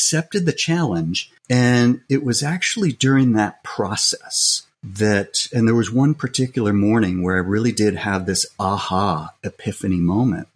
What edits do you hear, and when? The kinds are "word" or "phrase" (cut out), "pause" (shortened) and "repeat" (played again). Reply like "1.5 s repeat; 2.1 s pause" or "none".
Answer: 1.4 s pause; 4.7 s pause